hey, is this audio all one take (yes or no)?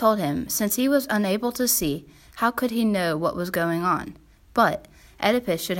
yes